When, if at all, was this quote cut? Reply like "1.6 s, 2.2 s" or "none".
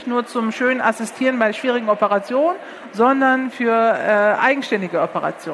none